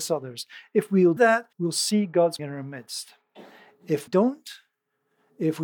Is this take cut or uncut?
cut